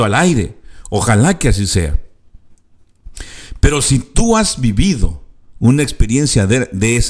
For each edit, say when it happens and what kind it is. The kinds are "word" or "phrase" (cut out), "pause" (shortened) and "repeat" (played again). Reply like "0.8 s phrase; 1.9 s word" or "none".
none